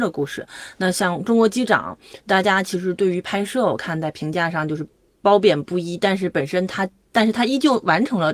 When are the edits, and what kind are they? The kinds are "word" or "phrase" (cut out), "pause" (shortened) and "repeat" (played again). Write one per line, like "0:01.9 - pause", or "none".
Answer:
none